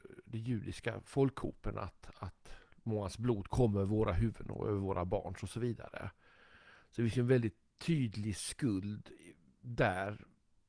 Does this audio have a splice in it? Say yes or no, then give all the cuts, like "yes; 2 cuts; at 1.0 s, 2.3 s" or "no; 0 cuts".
no; 0 cuts